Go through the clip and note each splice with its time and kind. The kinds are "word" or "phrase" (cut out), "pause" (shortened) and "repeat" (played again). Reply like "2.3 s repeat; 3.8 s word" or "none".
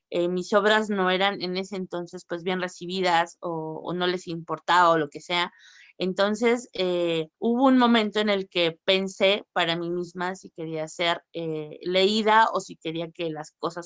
7.3 s pause